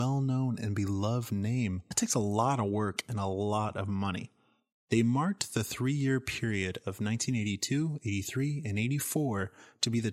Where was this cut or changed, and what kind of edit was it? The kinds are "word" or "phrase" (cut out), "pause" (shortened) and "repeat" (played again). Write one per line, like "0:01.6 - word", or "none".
0:01.9 - word